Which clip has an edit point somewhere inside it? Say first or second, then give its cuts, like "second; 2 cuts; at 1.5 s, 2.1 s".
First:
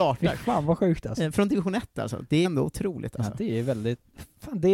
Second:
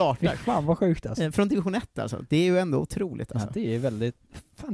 first; 1 cut; at 2.4 s